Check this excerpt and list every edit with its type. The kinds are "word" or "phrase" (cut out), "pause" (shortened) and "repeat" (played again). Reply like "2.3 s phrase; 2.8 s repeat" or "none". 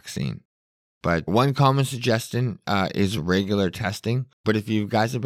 1.3 s word; 4.3 s pause